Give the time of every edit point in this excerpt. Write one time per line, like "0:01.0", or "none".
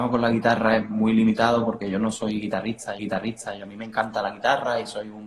0:03.0